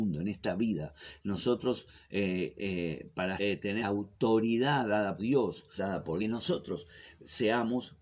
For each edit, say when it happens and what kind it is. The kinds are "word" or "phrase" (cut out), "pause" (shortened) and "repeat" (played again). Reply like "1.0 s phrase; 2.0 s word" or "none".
3.4 s word; 3.8 s word; 5.2 s word; 5.8 s phrase; 6.2 s phrase